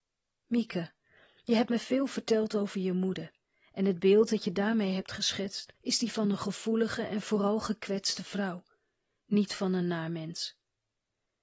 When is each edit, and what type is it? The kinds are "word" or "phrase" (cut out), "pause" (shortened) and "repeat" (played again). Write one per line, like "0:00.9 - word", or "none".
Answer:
0:05.8 - pause